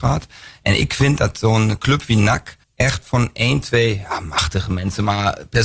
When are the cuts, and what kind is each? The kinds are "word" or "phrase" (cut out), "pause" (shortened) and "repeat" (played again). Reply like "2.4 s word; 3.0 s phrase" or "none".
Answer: 2.6 s pause